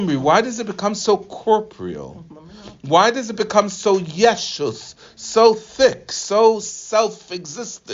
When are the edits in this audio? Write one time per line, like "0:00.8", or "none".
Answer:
none